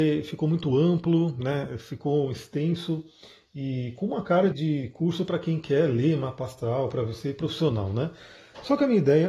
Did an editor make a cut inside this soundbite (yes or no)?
yes